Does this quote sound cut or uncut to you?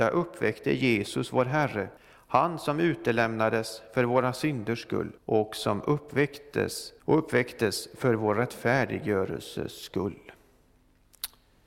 cut